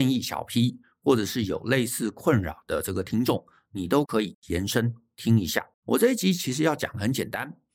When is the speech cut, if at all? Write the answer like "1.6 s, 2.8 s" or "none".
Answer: 5.7 s